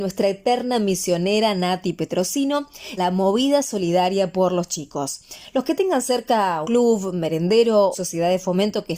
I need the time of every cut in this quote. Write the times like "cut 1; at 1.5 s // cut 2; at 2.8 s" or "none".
cut 1; at 3.0 s // cut 2; at 6.6 s // cut 3; at 7.9 s